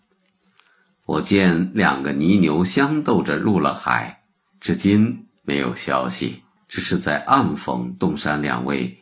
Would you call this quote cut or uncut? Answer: cut